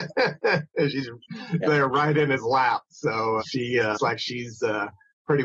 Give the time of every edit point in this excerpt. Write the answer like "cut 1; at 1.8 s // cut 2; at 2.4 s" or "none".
cut 1; at 1.6 s // cut 2; at 3.4 s // cut 3; at 3.9 s